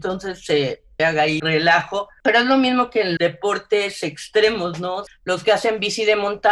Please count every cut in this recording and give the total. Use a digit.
4